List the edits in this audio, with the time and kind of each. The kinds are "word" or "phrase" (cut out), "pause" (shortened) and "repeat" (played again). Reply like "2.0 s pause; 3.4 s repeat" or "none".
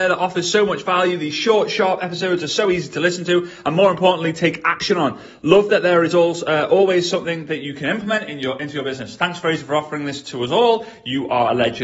none